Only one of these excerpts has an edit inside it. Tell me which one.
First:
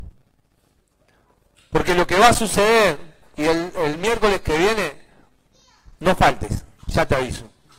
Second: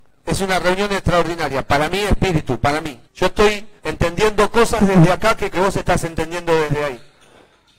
second; 3 cuts; at 3.1 s, 3.8 s, 5.5 s

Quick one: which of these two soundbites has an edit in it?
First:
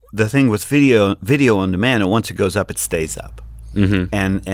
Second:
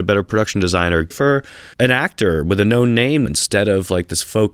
second; 3 cuts; at 1.1 s, 1.7 s, 3.3 s

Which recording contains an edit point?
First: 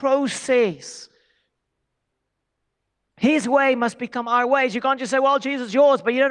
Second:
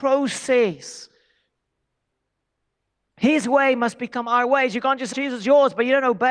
second; 1 cut; at 5.1 s

